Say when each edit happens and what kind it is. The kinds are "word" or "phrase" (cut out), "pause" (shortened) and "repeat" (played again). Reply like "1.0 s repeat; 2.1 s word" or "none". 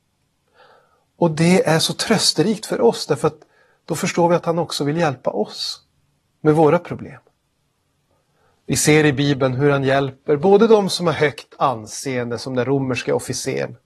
none